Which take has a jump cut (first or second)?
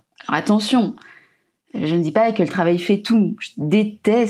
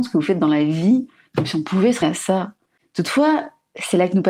second